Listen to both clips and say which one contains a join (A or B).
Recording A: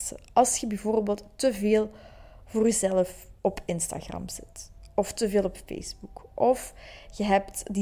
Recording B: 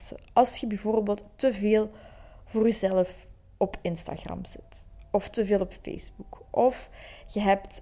A